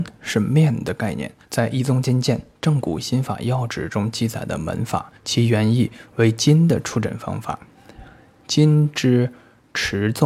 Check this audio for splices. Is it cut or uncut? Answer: cut